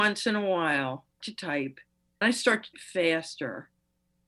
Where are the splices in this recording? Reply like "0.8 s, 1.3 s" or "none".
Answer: 1.2 s, 2.2 s, 2.7 s